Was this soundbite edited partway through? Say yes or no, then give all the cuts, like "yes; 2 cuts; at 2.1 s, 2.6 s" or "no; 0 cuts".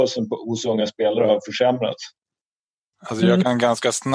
no; 0 cuts